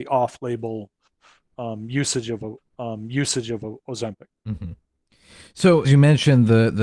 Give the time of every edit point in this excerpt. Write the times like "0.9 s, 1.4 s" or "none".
2.6 s, 5.8 s